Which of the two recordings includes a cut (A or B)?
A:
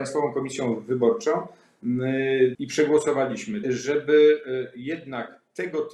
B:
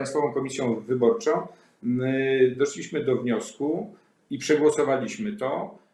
A